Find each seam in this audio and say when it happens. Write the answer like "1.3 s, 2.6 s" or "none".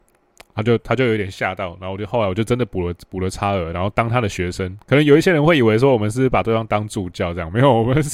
4.8 s